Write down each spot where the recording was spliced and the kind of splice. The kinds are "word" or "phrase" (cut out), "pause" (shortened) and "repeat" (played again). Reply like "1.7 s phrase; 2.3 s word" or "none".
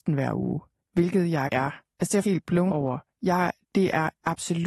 1.5 s word; 1.9 s word; 2.2 s word; 2.7 s word